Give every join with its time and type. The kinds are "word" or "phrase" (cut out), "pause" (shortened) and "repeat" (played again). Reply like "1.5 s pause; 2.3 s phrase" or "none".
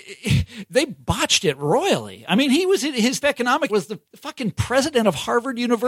3.2 s word; 3.7 s word; 4.1 s pause